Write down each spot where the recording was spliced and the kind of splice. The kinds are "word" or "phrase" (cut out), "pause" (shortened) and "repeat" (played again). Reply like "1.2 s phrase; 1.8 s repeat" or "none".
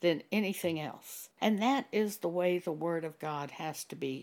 1.3 s pause